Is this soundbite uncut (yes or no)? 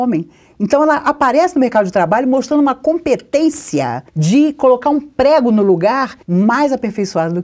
no